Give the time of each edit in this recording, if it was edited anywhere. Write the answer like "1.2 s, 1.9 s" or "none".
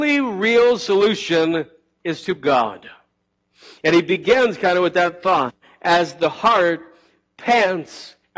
2.4 s